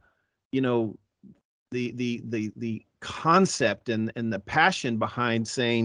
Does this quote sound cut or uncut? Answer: uncut